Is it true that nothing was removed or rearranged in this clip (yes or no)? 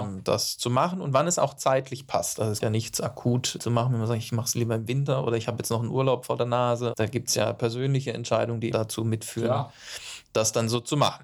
no